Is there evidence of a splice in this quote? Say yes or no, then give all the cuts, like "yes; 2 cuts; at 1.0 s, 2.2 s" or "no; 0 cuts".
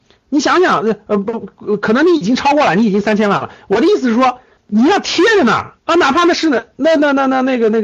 yes; 2 cuts; at 4.6 s, 5.8 s